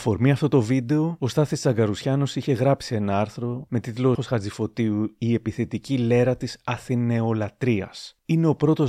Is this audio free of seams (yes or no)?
no